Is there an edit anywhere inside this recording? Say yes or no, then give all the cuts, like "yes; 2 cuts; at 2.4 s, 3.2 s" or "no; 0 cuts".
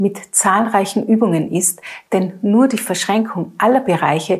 no; 0 cuts